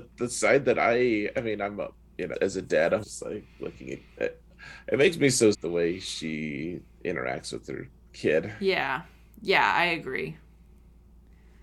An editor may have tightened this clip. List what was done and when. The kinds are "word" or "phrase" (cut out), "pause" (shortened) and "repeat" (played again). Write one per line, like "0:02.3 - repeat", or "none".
0:02.3 - word
0:03.0 - word
0:05.5 - word